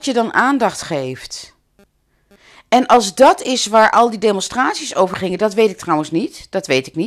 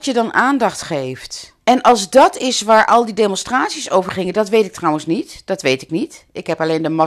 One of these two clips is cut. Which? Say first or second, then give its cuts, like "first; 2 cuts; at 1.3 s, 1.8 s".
second; 1 cut; at 1.6 s